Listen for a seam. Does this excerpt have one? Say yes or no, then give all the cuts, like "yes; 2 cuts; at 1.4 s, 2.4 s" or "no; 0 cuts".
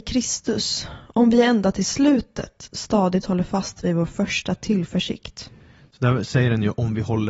no; 0 cuts